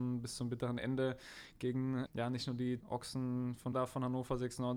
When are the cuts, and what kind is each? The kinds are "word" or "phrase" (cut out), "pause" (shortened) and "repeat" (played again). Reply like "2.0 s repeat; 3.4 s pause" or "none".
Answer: 2.1 s word; 2.8 s word; 3.7 s word